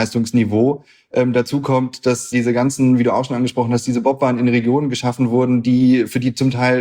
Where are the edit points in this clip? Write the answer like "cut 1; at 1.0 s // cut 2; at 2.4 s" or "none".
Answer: cut 1; at 2.3 s